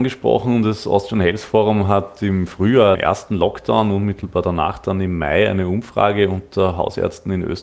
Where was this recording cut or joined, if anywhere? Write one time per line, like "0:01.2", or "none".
0:02.9